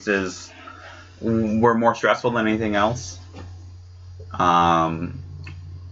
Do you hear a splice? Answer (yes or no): no